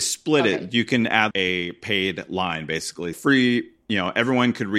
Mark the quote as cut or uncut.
cut